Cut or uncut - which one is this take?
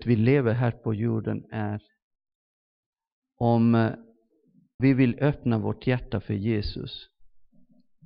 cut